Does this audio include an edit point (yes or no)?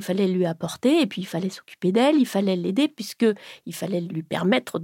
no